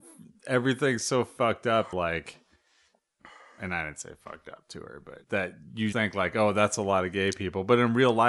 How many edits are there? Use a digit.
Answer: 3